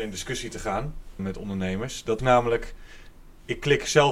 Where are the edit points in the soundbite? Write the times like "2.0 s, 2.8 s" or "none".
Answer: 1.2 s, 2.2 s